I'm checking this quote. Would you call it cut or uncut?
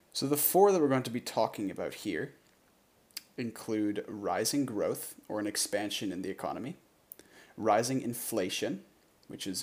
uncut